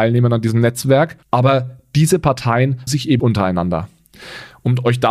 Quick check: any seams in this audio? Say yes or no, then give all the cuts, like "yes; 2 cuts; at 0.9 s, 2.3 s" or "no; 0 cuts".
yes; 3 cuts; at 1.2 s, 2.9 s, 3.2 s